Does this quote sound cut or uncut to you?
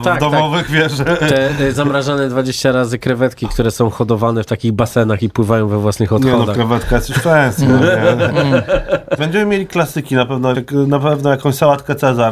cut